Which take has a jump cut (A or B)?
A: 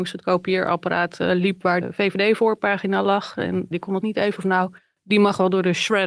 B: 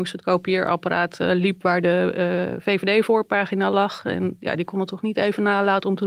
A